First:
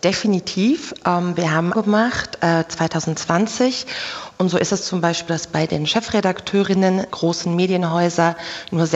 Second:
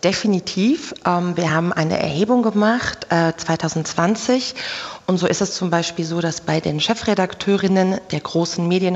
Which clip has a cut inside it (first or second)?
first